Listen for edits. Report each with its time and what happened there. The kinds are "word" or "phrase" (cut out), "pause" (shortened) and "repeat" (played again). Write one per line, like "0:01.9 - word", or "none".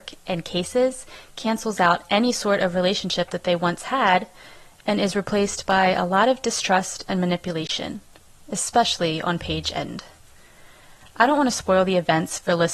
none